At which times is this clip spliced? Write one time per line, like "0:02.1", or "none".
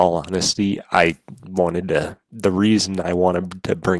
none